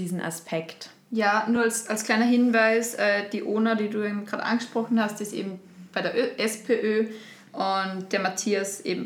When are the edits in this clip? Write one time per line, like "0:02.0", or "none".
none